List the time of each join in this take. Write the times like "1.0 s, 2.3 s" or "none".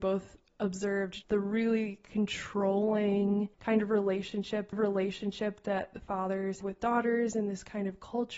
1.2 s, 3.5 s, 4.7 s, 6.6 s